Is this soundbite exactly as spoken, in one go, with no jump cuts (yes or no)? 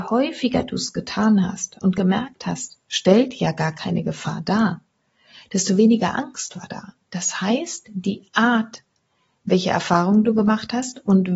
yes